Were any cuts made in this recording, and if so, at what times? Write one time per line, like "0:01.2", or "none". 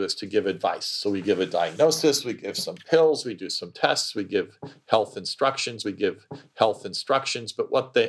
0:05.8

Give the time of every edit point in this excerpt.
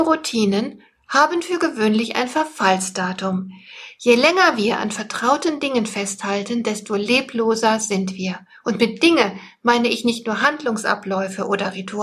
none

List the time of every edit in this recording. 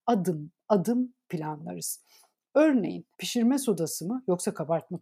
0:03.1

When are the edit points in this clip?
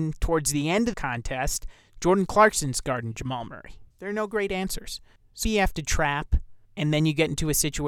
0:00.9
0:03.9
0:05.4
0:06.6

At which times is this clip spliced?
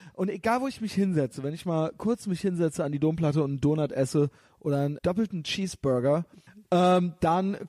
0:05.0

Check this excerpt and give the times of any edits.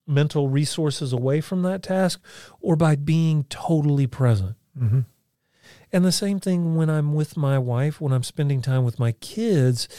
none

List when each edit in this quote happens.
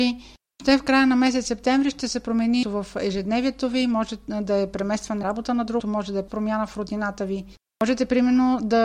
0:02.6
0:05.2
0:05.8
0:06.3

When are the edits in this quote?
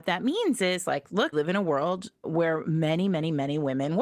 0:01.3
0:02.2

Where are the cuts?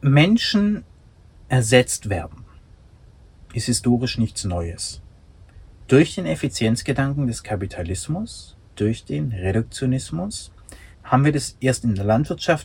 0:10.9

